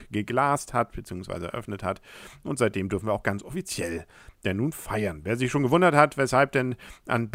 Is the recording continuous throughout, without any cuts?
yes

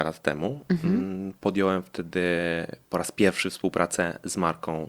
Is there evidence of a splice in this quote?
yes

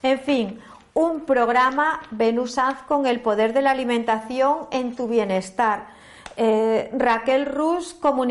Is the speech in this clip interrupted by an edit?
no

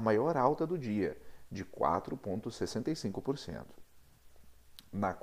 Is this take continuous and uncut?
yes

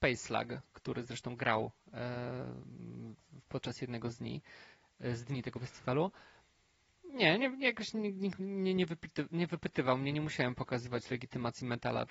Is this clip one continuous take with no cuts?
yes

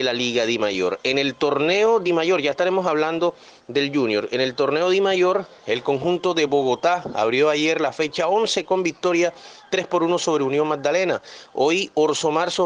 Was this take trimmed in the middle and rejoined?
no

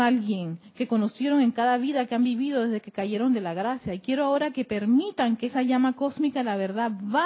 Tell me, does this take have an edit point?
no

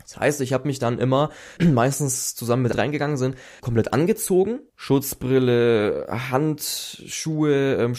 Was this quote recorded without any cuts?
no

